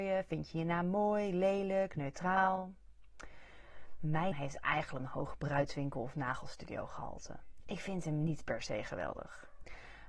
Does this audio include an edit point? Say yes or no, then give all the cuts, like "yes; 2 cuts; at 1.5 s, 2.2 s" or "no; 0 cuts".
yes; 2 cuts; at 4.3 s, 5.0 s